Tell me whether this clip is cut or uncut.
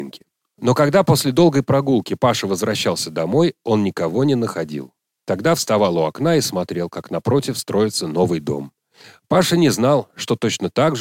uncut